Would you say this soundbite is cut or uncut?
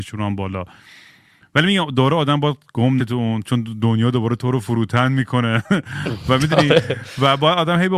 cut